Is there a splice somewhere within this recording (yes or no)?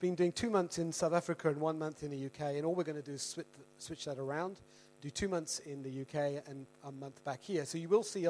no